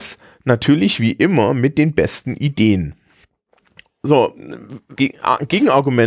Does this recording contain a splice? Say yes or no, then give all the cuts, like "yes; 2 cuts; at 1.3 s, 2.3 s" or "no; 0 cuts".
yes; 1 cut; at 4.9 s